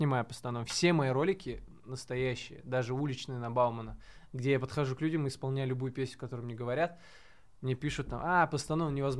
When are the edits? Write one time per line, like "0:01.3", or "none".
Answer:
none